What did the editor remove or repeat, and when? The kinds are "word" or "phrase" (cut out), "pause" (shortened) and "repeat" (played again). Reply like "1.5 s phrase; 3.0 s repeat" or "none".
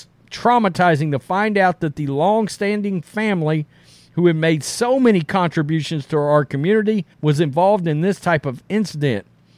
7.1 s pause